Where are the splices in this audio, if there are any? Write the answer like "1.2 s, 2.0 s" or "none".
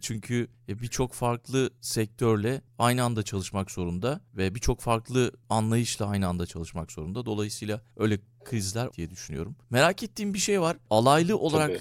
8.9 s